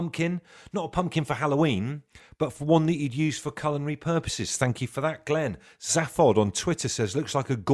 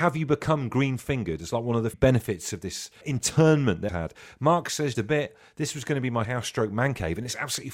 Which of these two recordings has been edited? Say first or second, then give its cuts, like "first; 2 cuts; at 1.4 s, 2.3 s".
second; 5 cuts; at 1.9 s, 3.0 s, 3.9 s, 4.9 s, 6.2 s